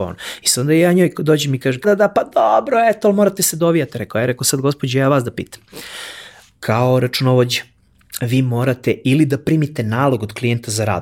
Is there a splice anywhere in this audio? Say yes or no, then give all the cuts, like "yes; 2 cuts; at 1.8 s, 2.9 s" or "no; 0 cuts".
yes; 1 cut; at 1.8 s